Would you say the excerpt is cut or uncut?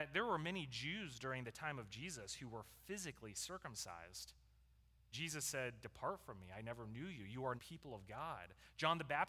cut